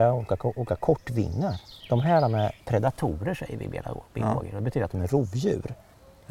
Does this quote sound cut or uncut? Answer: cut